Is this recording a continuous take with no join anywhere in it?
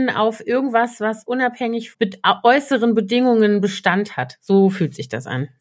no; 1 cut; at 1.9 s

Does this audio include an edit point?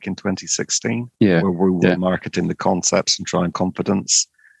yes; 2 cuts; at 1.1 s, 3.5 s

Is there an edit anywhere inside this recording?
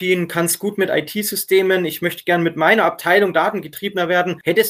no; 0 cuts

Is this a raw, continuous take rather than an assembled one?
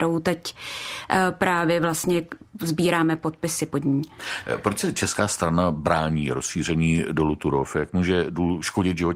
yes; 0 cuts

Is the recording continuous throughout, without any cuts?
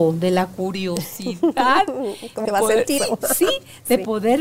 no; 2 cuts; at 2.4 s, 3.0 s

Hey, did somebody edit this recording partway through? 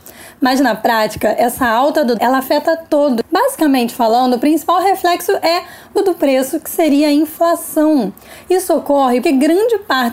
yes; 3 cuts; at 2.2 s, 6.0 s, 9.2 s

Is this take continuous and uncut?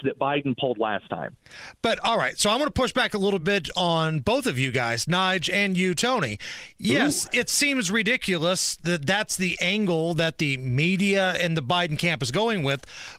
yes; 0 cuts

